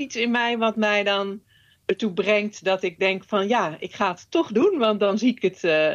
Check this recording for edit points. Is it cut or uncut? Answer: uncut